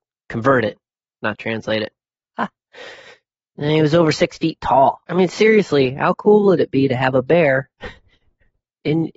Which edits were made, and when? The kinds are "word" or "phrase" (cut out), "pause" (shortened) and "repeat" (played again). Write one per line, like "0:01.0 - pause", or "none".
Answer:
none